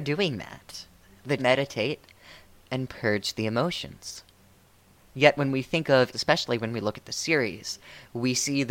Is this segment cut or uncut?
cut